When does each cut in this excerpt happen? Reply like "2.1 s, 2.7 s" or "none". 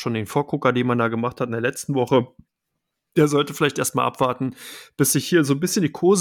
none